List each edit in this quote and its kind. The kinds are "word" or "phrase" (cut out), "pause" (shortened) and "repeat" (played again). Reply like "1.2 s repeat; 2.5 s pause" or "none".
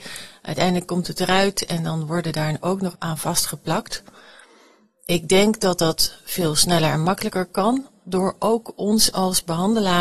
2.9 s phrase